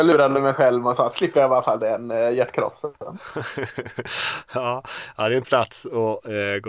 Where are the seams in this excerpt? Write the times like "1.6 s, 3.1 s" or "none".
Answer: 5.4 s